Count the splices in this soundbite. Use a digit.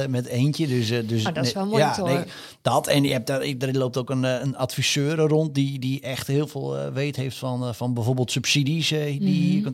0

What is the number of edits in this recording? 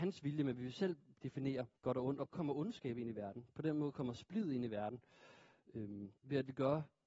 3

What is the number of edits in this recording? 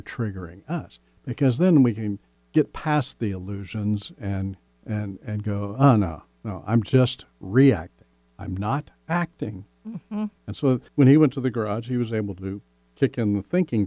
4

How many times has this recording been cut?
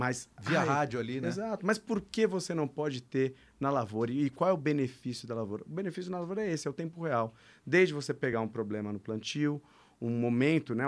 0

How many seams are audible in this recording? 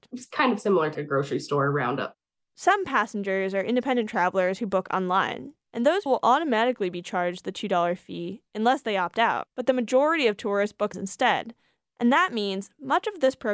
4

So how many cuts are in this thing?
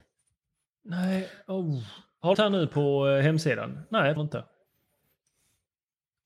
2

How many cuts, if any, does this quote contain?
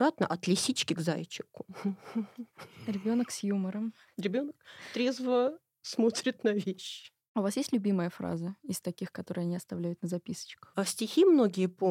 0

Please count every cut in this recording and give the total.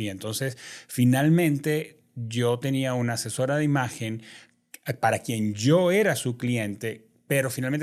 0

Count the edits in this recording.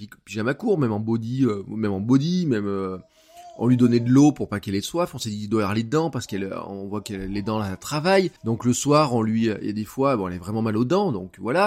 1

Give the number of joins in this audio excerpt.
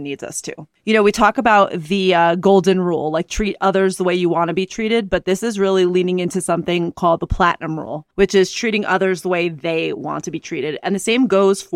1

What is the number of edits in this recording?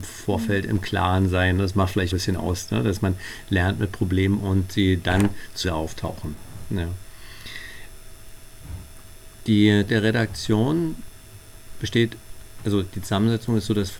4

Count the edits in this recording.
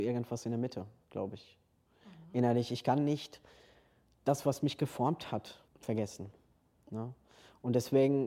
1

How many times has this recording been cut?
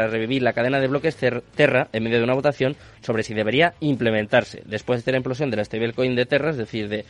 0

